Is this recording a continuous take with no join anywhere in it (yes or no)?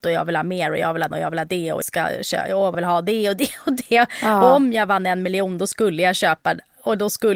no